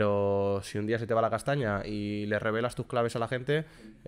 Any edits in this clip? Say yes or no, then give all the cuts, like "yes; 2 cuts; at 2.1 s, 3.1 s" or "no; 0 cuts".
no; 0 cuts